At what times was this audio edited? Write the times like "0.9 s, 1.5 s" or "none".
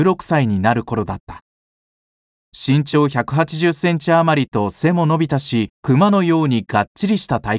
5.7 s